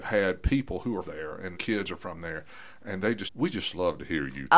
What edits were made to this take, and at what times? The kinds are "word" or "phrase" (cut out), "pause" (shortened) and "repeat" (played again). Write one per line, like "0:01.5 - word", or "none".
0:01.0 - word
0:01.5 - word
0:03.3 - word